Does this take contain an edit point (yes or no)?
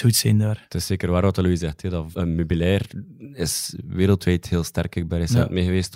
yes